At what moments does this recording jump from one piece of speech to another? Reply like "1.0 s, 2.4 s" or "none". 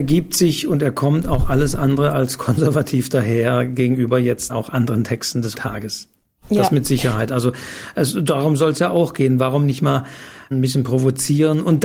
4.5 s, 5.5 s, 10.5 s